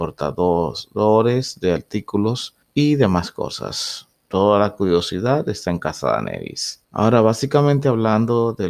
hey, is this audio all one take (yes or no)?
no